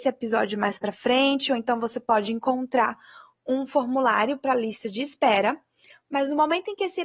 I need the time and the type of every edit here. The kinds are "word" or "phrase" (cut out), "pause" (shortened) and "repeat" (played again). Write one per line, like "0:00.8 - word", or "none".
none